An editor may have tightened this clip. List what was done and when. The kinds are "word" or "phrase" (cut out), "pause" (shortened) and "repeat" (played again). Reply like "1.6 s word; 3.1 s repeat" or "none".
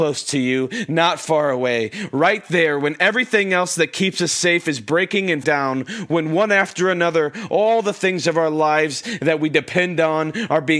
5.4 s word